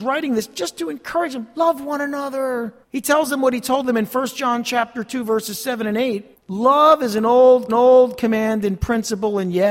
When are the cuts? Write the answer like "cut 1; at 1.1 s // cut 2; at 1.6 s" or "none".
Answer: cut 1; at 2.8 s // cut 2; at 6.3 s // cut 3; at 7.7 s